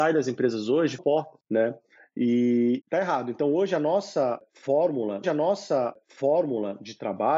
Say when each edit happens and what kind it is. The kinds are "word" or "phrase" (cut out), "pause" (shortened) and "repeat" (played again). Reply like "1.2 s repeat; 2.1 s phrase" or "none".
1.0 s word; 5.2 s repeat